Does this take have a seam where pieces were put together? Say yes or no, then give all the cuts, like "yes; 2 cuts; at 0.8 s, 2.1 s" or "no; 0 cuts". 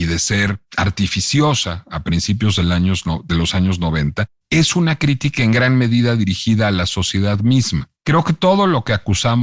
yes; 2 cuts; at 4.4 s, 8.0 s